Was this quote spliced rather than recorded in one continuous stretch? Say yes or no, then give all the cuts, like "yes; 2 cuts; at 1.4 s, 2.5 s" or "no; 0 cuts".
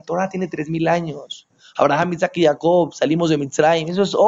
no; 0 cuts